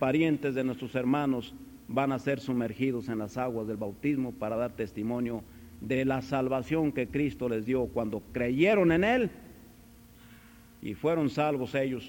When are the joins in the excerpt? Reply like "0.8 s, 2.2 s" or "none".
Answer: none